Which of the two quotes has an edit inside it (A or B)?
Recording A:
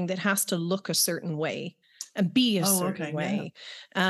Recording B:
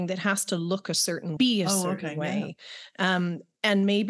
B